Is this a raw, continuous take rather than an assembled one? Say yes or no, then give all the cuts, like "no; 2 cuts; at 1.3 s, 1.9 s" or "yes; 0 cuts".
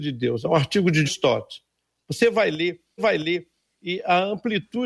no; 2 cuts; at 1.0 s, 3.0 s